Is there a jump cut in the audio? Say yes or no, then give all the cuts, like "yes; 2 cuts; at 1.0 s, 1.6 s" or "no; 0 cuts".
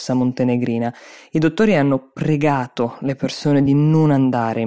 no; 0 cuts